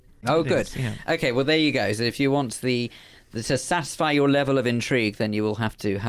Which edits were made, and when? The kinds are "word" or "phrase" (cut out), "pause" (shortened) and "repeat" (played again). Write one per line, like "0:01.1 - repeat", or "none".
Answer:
none